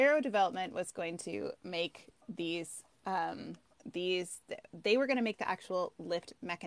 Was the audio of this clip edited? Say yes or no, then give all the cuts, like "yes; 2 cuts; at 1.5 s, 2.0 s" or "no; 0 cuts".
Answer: yes; 1 cut; at 3.7 s